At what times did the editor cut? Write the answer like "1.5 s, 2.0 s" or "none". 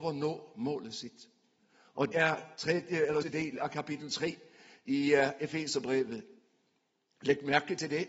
2.1 s, 3.2 s